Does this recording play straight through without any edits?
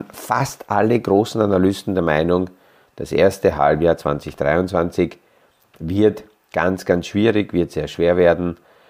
yes; 0 cuts

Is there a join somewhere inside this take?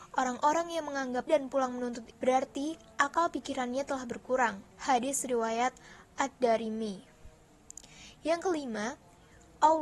yes; 3 cuts; at 1.3 s, 2.1 s, 4.7 s

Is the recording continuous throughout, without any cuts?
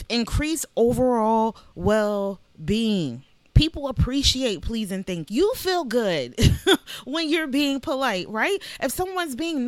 no; 1 cut; at 5.3 s

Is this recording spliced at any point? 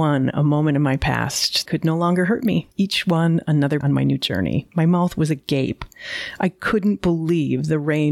yes; 2 cuts; at 1.7 s, 3.8 s

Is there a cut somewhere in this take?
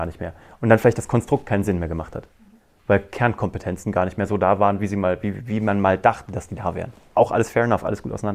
no; 0 cuts

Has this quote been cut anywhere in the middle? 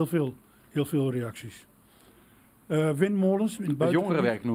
no; 0 cuts

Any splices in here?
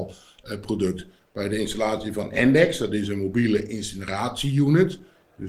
no; 0 cuts

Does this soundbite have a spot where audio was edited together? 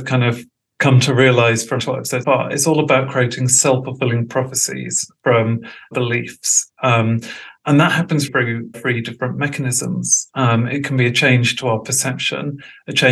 yes; 5 cuts; at 1.8 s, 2.2 s, 5.9 s, 8.3 s, 8.7 s

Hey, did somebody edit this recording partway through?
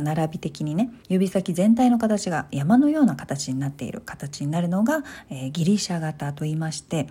yes; 1 cut; at 1.0 s

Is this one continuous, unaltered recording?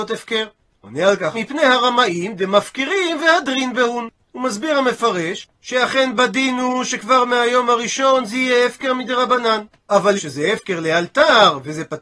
no; 2 cuts; at 1.3 s, 10.2 s

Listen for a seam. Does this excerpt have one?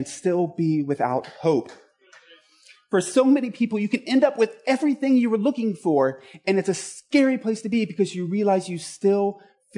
no; 0 cuts

